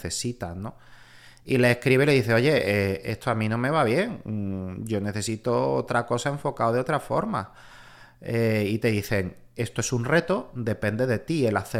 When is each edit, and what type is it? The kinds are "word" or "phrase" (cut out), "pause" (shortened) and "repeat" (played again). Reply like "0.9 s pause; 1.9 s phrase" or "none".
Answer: none